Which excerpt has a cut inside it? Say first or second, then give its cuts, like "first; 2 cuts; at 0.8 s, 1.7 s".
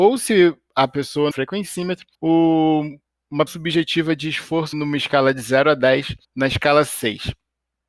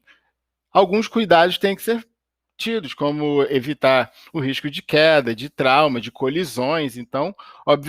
first; 5 cuts; at 1.3 s, 2.1 s, 3.5 s, 4.7 s, 6.2 s